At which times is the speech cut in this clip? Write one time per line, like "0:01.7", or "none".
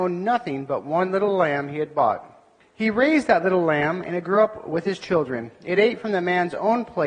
none